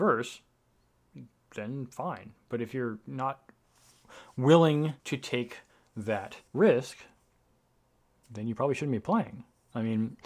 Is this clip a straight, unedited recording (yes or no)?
no